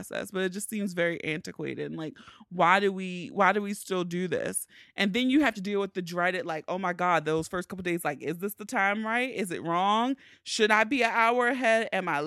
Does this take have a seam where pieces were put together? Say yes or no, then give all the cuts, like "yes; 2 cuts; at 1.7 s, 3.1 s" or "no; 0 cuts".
no; 0 cuts